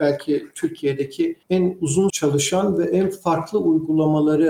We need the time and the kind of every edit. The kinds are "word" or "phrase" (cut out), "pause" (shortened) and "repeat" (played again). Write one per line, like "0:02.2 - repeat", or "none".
0:01.4 - pause
0:02.1 - word